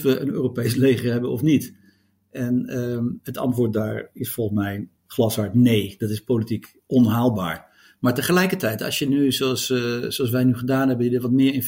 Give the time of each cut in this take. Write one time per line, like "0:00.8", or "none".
0:05.0